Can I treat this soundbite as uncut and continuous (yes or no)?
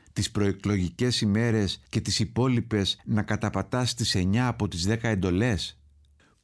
no